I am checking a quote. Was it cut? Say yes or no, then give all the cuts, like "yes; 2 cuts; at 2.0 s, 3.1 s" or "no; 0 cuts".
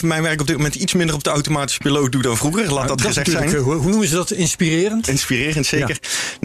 no; 0 cuts